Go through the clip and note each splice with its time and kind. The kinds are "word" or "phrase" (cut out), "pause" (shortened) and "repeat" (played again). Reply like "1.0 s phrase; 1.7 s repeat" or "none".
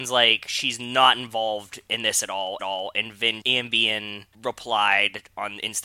2.6 s repeat; 3.4 s word; 4.3 s pause